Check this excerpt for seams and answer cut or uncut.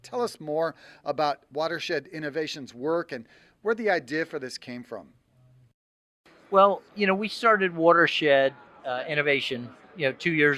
uncut